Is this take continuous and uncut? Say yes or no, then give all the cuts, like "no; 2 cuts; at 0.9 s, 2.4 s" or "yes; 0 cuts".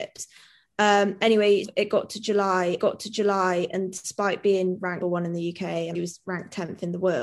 no; 4 cuts; at 1.6 s, 2.8 s, 5.0 s, 5.9 s